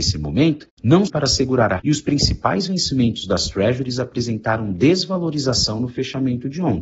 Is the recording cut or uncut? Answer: cut